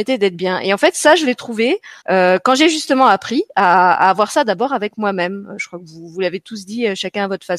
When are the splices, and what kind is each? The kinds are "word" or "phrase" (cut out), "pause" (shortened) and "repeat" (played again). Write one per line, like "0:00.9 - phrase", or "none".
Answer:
0:02.0 - pause